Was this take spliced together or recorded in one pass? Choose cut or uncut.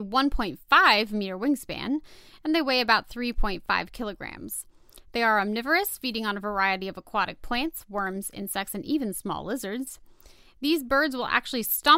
uncut